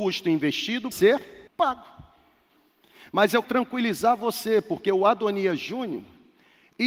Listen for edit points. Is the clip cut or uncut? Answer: cut